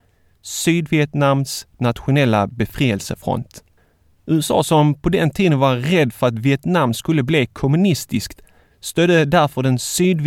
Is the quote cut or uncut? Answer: uncut